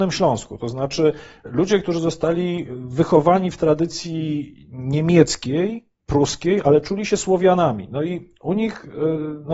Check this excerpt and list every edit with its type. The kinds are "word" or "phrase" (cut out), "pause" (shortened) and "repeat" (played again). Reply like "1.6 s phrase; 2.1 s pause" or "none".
none